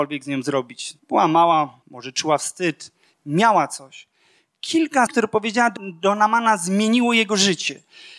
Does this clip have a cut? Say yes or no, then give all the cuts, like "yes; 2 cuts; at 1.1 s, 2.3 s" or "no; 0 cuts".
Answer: yes; 5 cuts; at 1.0 s, 1.8 s, 3.1 s, 5.1 s, 5.8 s